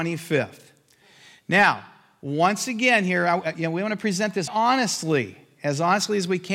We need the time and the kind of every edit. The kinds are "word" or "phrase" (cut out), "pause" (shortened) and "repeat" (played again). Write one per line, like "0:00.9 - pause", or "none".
0:04.5 - word